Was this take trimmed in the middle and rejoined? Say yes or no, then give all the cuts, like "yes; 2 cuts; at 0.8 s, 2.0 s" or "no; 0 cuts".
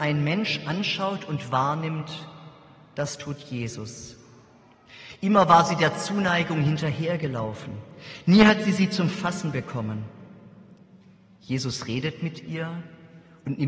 no; 0 cuts